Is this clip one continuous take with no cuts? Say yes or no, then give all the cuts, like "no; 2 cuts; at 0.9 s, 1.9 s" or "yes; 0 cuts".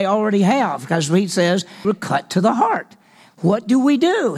no; 1 cut; at 1.8 s